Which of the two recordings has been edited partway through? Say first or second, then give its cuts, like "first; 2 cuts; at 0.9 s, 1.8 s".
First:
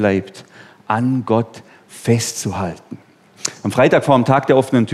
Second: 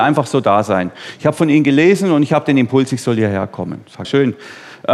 second; 1 cut; at 4.0 s